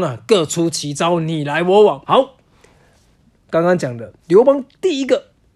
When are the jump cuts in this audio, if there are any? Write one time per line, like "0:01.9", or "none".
0:02.0
0:04.2